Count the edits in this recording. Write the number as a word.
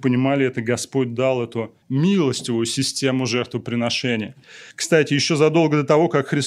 two